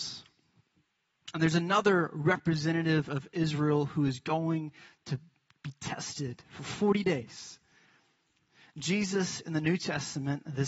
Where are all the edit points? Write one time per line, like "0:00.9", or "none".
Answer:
none